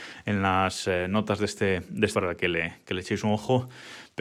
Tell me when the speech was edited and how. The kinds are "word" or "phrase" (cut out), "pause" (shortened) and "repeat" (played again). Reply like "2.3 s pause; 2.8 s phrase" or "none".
2.1 s word